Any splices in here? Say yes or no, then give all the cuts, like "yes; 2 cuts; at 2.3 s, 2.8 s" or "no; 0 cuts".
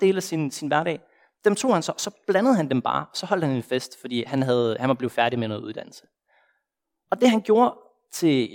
no; 0 cuts